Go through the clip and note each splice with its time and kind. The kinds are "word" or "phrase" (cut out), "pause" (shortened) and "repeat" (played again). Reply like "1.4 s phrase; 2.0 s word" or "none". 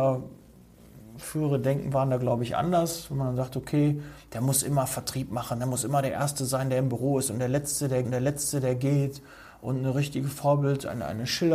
8.0 s repeat